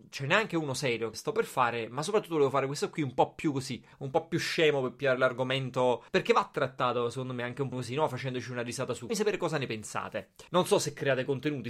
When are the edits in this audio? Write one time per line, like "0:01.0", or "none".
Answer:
0:01.1
0:03.9
0:06.1
0:07.7
0:09.1
0:10.5